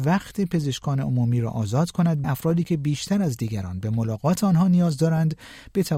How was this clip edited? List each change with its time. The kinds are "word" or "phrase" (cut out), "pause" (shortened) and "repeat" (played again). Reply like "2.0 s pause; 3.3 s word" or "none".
2.2 s phrase